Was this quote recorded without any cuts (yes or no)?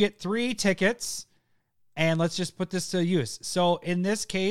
yes